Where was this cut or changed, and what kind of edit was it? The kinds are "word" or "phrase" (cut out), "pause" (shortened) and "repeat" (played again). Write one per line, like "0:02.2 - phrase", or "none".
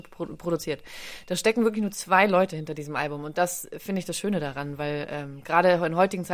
none